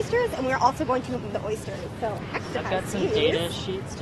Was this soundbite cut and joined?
yes; 2 cuts; at 1.3 s, 2.5 s

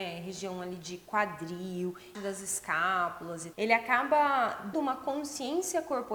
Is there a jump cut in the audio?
yes; 3 cuts; at 2.1 s, 3.5 s, 4.7 s

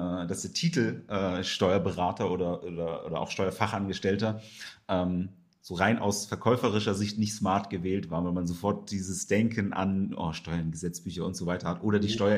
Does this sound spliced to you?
no; 0 cuts

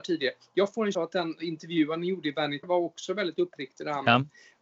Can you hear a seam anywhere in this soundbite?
yes; 2 cuts; at 0.9 s, 2.6 s

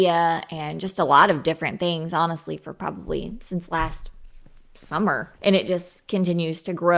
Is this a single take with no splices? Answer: no; 1 cut; at 5.4 s

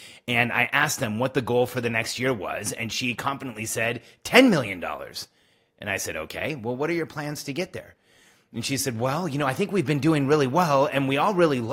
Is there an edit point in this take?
no; 0 cuts

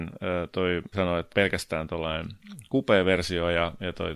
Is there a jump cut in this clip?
yes; 2 cuts; at 0.9 s, 1.3 s

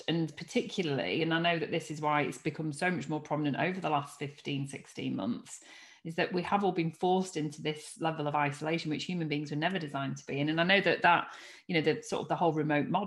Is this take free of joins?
yes; 0 cuts

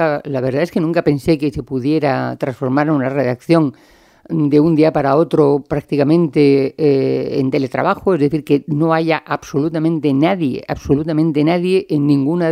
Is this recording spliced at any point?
no; 0 cuts

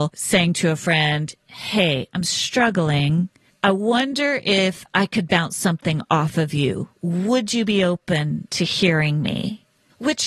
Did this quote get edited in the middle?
no; 0 cuts

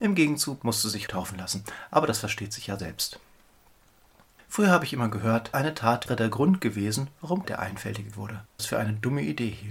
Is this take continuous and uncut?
no; 7 cuts; at 1.1 s, 2.8 s, 5.5 s, 6.1 s, 7.4 s, 8.1 s, 8.6 s

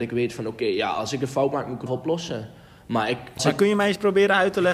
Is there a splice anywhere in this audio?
yes; 2 cuts; at 1.9 s, 3.4 s

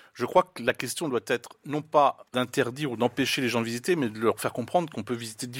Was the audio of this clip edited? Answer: yes; 1 cut; at 2.3 s

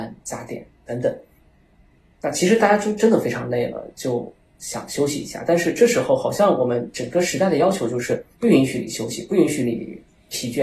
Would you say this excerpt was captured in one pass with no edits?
yes; 0 cuts

